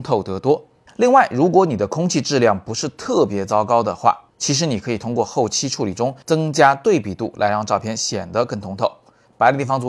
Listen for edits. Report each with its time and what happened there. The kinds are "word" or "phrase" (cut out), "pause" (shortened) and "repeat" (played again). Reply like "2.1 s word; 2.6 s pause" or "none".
none